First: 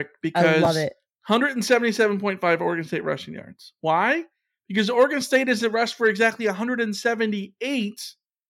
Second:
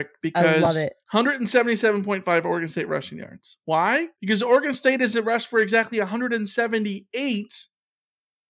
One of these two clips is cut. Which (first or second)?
second